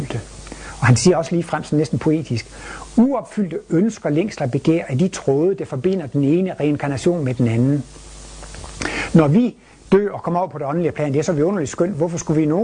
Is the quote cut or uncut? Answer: uncut